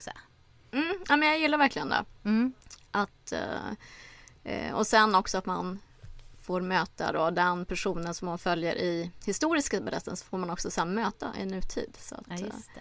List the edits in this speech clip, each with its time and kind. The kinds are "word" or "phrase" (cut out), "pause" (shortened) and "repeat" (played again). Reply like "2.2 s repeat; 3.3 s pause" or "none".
2.2 s pause